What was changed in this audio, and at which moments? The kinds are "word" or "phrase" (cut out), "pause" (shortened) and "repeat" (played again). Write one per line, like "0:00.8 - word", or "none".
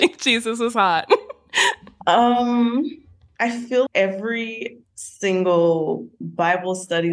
0:03.9 - word